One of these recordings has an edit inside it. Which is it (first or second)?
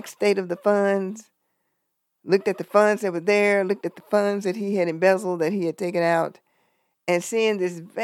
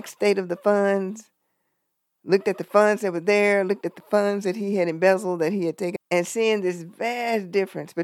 second